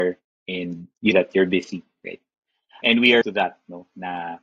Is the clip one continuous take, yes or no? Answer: no